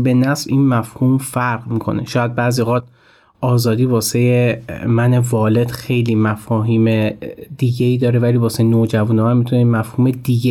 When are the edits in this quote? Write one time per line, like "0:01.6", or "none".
none